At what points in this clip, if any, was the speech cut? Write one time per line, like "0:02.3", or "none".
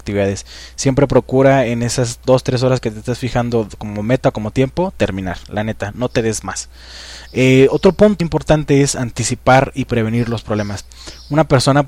0:08.2